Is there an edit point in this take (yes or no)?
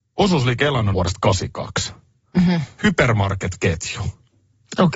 yes